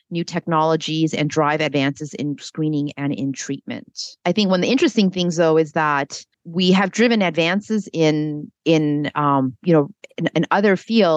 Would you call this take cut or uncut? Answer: cut